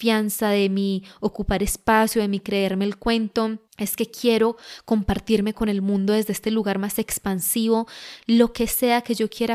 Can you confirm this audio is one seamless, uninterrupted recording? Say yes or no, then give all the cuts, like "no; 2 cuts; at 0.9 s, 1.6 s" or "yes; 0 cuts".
no; 1 cut; at 3.7 s